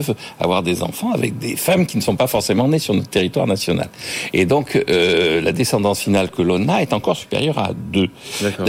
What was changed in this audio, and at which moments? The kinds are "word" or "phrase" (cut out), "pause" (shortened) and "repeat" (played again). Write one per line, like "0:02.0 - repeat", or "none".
none